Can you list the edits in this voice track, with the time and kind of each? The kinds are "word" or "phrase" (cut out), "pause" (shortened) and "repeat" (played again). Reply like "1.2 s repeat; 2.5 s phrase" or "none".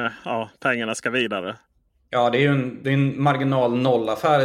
none